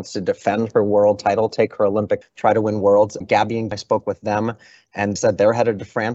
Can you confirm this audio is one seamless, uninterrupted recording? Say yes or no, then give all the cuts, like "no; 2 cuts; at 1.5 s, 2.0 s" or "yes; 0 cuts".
no; 4 cuts; at 2.2 s, 3.2 s, 3.7 s, 5.2 s